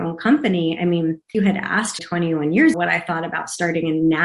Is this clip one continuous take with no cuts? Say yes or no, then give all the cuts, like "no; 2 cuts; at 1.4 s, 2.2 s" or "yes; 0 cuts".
no; 3 cuts; at 1.3 s, 2.0 s, 2.7 s